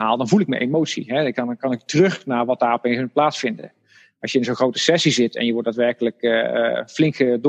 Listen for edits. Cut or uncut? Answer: uncut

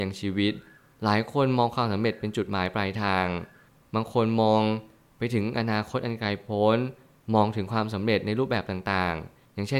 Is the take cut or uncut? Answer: uncut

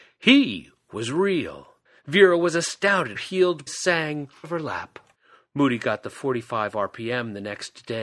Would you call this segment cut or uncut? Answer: cut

